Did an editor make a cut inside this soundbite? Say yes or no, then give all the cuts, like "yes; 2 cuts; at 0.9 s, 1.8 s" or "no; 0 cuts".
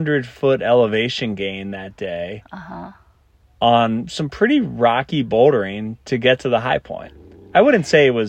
no; 0 cuts